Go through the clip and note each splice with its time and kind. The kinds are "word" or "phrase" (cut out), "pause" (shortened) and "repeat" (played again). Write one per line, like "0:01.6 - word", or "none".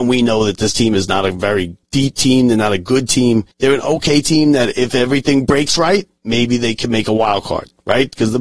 0:01.8 - pause
0:03.5 - pause
0:06.2 - pause